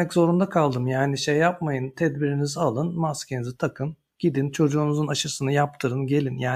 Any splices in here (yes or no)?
no